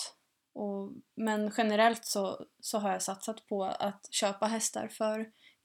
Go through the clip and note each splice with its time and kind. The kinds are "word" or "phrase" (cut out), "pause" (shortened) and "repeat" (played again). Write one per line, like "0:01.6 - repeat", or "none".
none